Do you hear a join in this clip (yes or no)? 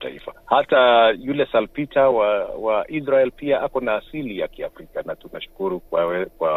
no